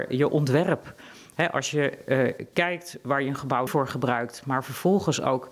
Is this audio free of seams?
no; 1 cut; at 3.7 s

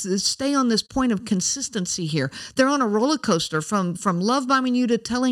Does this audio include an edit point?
no; 0 cuts

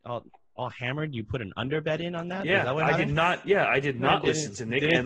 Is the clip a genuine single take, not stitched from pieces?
yes; 0 cuts

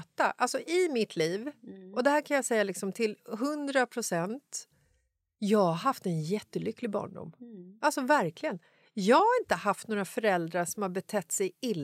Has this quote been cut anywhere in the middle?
no; 0 cuts

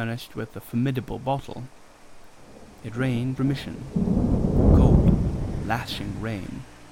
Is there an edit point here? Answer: yes; 2 cuts; at 3.4 s, 5.6 s

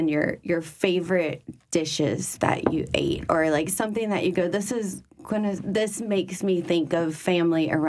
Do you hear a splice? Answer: no; 0 cuts

